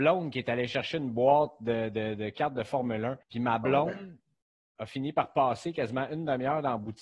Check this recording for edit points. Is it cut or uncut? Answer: cut